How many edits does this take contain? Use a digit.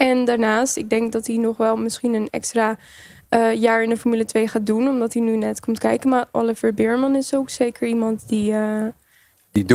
0